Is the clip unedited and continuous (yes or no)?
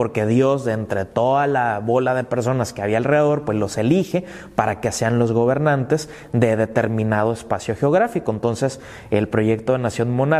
yes